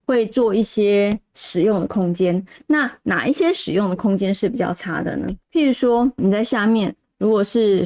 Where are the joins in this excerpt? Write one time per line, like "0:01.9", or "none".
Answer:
0:05.4
0:06.2